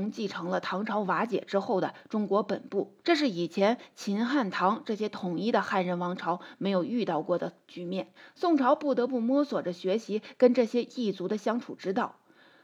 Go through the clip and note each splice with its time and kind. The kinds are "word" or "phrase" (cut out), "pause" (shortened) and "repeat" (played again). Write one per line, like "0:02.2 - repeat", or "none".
0:03.0 - pause
0:08.2 - pause